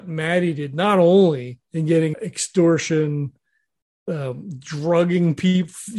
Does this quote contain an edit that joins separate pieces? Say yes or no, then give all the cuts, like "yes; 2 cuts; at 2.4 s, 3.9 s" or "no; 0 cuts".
yes; 2 cuts; at 1.6 s, 2.1 s